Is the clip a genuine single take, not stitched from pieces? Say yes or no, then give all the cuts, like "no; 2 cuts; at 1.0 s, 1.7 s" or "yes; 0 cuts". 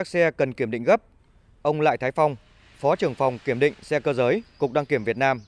yes; 0 cuts